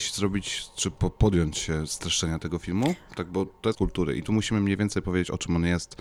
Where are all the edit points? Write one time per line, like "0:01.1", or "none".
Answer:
0:03.7